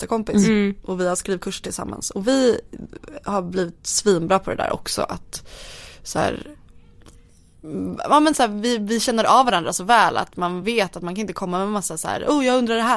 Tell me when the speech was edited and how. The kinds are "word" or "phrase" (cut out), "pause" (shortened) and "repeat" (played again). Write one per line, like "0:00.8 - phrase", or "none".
none